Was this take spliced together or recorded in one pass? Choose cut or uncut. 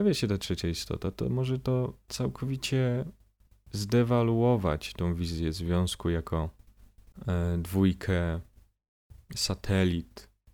uncut